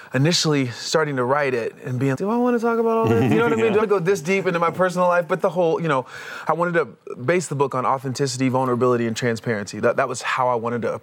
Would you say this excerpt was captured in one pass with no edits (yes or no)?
no